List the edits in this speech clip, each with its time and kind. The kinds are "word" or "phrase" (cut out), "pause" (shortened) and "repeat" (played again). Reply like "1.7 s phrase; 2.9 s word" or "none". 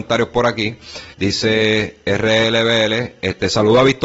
1.1 s pause